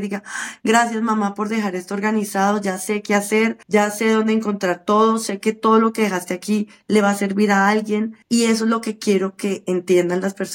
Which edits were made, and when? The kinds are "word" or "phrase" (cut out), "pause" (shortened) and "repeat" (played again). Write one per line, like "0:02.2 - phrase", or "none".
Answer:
0:03.6 - pause
0:08.2 - pause